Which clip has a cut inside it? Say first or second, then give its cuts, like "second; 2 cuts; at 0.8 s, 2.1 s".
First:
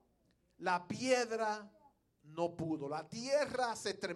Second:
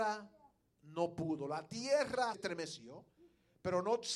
second; 1 cut; at 2.3 s